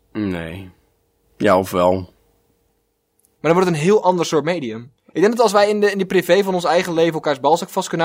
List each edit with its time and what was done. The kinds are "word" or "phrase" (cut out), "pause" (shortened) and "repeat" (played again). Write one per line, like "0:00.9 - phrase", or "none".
0:05.0 - pause